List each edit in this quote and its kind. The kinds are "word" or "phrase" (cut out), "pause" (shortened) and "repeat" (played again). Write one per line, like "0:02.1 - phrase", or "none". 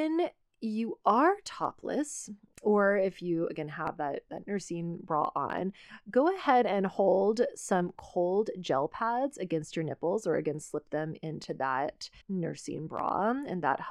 0:12.2 - pause